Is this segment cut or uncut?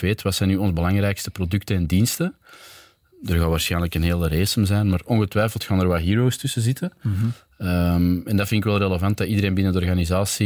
uncut